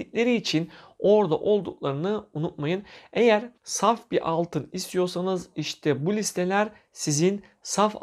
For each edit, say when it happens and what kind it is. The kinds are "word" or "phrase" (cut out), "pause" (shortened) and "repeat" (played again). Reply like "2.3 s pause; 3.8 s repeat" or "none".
3.6 s pause